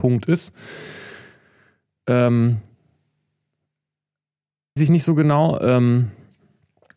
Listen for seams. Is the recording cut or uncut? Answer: cut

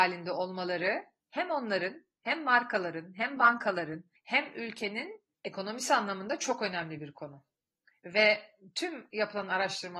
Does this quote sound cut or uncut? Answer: uncut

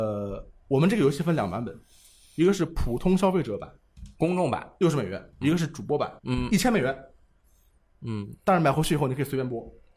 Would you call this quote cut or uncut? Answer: cut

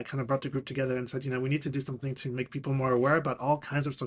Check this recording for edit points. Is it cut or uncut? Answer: uncut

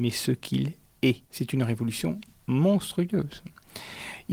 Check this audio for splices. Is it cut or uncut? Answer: cut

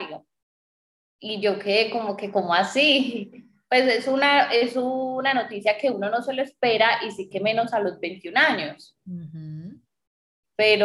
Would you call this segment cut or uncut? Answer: uncut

